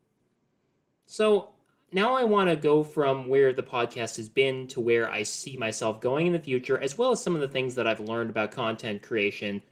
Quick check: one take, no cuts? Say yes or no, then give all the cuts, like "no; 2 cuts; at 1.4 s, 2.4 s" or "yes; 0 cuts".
yes; 0 cuts